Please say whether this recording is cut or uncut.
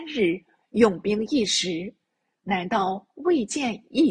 uncut